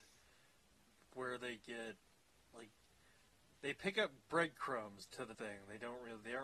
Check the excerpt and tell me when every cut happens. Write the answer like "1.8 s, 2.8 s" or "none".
5.3 s